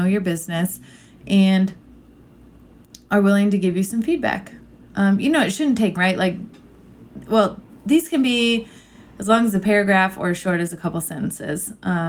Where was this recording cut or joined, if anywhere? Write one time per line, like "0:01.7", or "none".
0:06.0